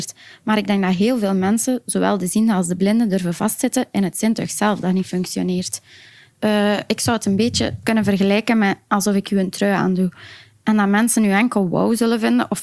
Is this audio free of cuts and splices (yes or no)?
yes